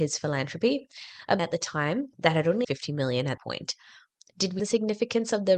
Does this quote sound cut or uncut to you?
cut